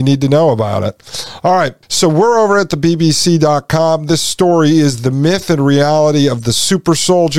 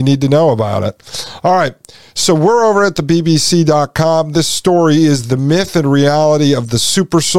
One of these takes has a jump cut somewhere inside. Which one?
first; 1 cut; at 1.8 s

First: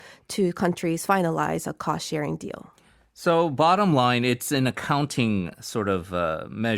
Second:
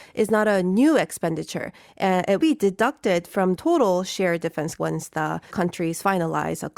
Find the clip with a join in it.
second; 4 cuts; at 2.4 s, 3.6 s, 4.8 s, 5.5 s

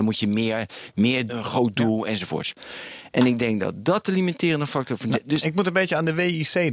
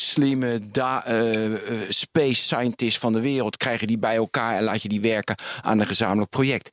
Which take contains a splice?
first; 1 cut; at 1.3 s

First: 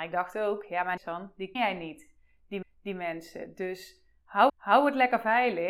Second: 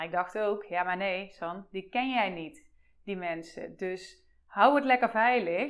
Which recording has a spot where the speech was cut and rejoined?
first; 4 cuts; at 1.0 s, 1.5 s, 2.6 s, 4.5 s

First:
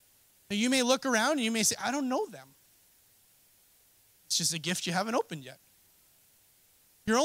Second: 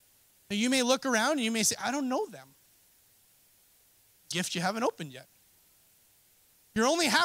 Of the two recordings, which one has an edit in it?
second; 1 cut; at 4.3 s

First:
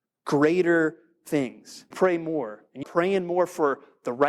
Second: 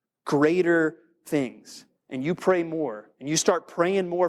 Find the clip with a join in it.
first; 2 cuts; at 1.9 s, 2.8 s

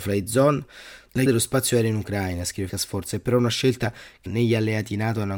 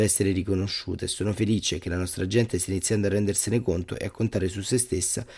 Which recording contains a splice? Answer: first; 3 cuts; at 1.3 s, 2.7 s, 4.3 s

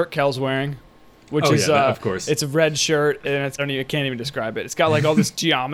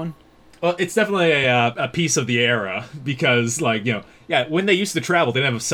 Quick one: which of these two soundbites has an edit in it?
first; 1 cut; at 3.6 s

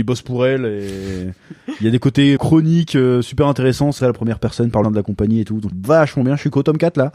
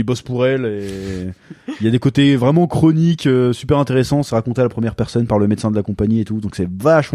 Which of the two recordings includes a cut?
first; 4 cuts; at 2.4 s, 4.0 s, 4.8 s, 5.7 s

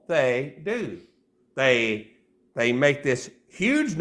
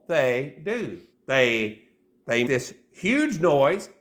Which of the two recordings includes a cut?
second; 2 cuts; at 1.1 s, 2.5 s

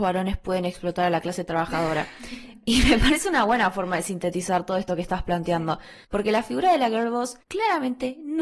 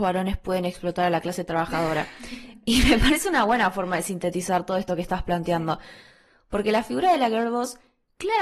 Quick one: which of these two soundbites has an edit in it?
first; 2 cuts; at 6.0 s, 7.4 s

